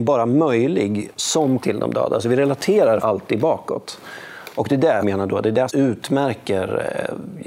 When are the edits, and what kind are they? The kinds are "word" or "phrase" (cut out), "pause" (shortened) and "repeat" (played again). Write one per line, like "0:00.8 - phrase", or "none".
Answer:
0:01.6 - word
0:03.0 - word
0:05.0 - phrase
0:05.7 - word